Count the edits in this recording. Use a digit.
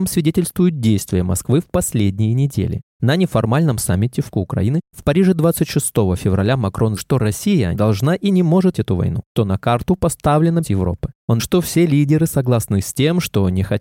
7